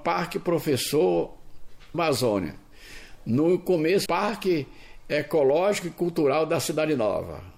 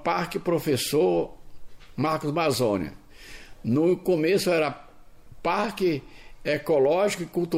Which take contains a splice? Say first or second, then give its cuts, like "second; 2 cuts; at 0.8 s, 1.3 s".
first; 2 cuts; at 1.9 s, 4.1 s